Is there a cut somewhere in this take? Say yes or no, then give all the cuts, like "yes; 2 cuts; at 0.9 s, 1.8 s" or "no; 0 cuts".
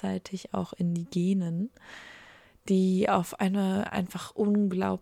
no; 0 cuts